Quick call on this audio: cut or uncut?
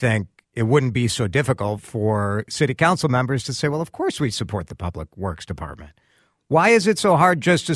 uncut